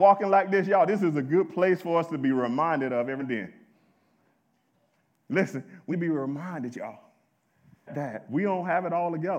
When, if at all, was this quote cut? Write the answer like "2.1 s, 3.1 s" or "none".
3.2 s, 5.9 s, 7.9 s